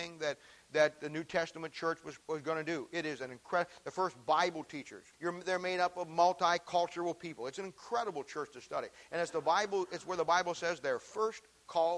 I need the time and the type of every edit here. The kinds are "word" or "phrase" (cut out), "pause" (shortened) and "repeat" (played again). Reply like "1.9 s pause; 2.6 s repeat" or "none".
2.2 s pause; 5.1 s pause